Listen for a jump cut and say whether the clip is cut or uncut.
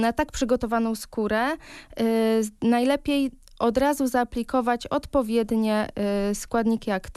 uncut